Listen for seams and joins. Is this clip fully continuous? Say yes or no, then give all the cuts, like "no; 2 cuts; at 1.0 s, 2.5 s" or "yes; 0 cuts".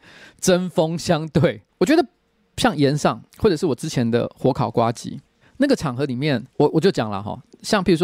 no; 4 cuts; at 1.7 s, 3.3 s, 5.4 s, 6.5 s